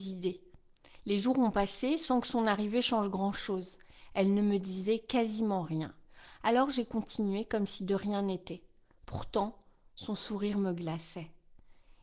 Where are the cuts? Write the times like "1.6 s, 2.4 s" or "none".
none